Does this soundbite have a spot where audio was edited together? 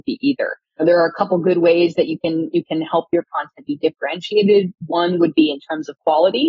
no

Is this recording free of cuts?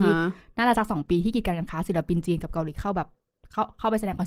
yes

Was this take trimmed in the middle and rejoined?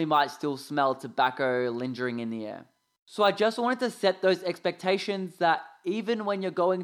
no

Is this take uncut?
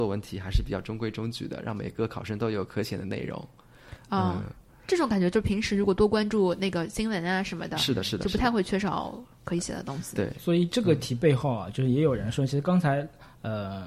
yes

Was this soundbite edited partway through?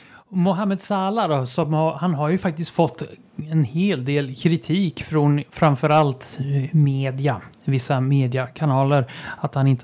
no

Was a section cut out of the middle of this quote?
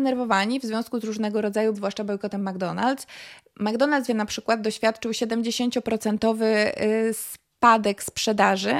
yes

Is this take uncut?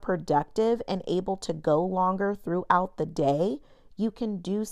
yes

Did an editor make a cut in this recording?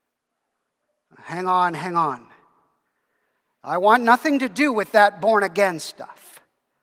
no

